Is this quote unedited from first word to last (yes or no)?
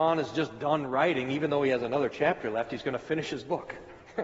yes